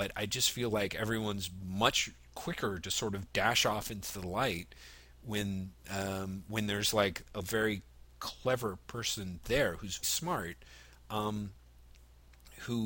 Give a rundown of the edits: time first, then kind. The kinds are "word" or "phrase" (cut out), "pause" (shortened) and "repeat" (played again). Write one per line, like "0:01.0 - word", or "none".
0:05.8 - pause
0:10.0 - word